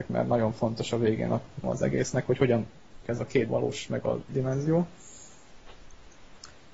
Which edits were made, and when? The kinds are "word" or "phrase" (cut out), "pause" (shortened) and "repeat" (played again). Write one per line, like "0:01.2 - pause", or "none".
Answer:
0:01.6 - word
0:03.0 - word
0:03.5 - word
0:04.3 - word